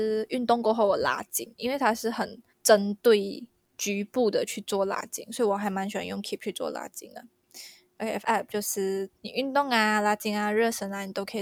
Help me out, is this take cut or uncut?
cut